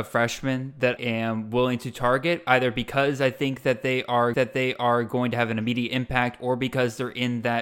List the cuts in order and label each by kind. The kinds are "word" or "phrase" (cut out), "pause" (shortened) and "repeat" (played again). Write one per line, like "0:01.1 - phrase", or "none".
0:01.0 - word
0:04.3 - repeat